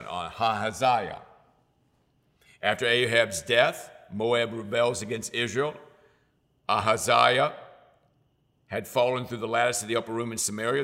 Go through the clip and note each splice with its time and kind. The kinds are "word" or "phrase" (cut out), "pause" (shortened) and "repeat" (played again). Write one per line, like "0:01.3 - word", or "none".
none